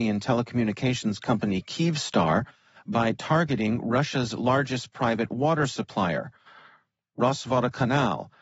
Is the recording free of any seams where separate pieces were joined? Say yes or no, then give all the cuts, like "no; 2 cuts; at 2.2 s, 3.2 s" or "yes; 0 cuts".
yes; 0 cuts